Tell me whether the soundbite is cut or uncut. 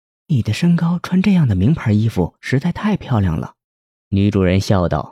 cut